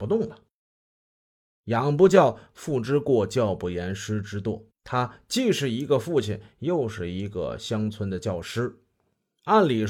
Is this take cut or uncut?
cut